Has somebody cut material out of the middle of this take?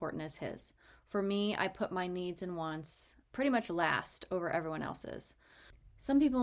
yes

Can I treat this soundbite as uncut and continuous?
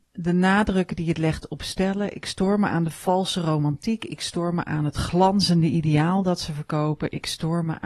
yes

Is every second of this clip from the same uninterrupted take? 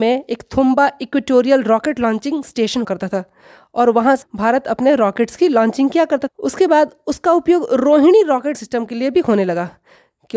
no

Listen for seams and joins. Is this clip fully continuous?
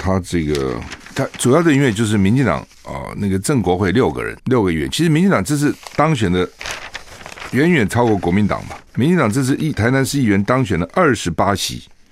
no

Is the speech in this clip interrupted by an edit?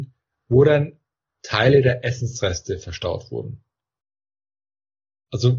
no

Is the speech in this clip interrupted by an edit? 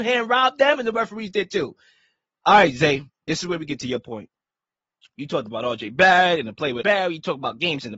yes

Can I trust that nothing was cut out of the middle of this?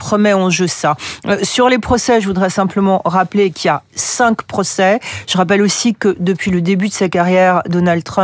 yes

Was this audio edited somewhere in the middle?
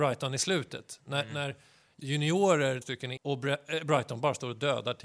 yes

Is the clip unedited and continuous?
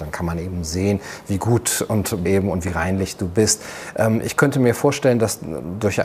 no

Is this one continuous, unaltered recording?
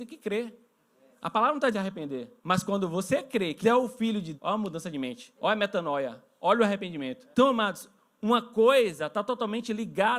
no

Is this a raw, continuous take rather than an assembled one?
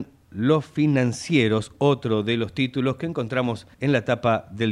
no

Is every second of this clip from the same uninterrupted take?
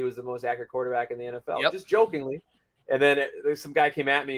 yes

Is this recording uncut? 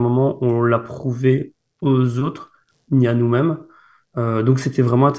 yes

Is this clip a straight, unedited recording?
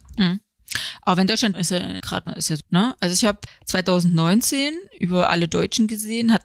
no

